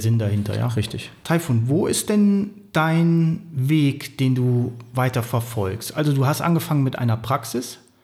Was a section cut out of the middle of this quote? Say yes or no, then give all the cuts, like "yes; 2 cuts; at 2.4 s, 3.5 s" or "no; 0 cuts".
no; 0 cuts